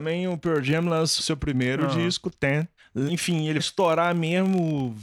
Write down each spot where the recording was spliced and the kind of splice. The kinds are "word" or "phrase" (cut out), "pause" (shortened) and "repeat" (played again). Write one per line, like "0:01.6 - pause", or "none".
0:01.2 - word
0:03.1 - word
0:03.6 - word